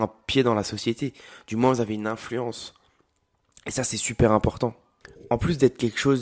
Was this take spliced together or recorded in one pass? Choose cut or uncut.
uncut